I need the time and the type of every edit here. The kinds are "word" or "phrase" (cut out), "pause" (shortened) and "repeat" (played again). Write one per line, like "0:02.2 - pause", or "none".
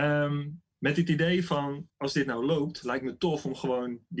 0:01.9 - pause